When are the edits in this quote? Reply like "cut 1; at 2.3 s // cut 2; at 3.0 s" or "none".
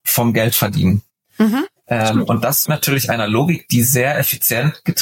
cut 1; at 2.7 s